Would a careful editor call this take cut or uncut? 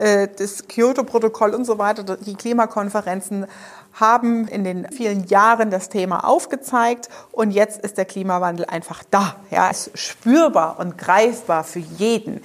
cut